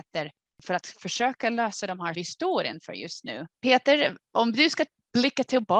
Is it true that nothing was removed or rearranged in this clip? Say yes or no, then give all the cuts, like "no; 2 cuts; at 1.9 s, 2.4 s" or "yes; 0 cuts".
no; 2 cuts; at 2.1 s, 3.5 s